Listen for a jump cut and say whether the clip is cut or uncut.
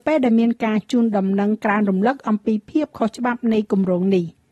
uncut